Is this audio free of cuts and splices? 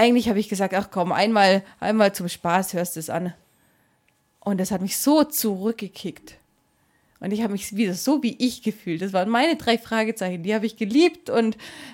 yes; 0 cuts

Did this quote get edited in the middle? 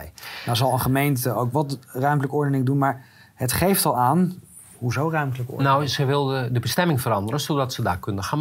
no; 0 cuts

